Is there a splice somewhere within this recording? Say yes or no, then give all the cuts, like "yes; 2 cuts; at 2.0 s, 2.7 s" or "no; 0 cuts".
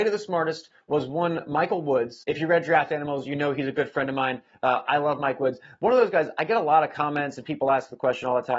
no; 0 cuts